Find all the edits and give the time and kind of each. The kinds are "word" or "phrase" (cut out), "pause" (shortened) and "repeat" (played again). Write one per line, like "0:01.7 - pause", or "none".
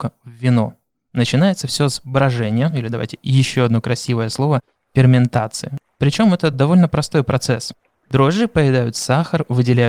none